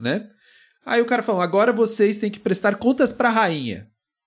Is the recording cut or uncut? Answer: uncut